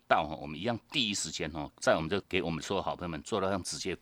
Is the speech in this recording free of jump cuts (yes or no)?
no